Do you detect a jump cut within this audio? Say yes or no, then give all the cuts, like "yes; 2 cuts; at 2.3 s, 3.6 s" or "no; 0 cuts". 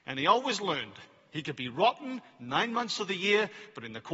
no; 0 cuts